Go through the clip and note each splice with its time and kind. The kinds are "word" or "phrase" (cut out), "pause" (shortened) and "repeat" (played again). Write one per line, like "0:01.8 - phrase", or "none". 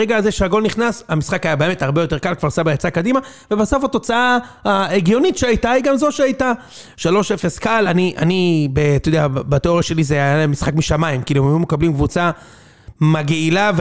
none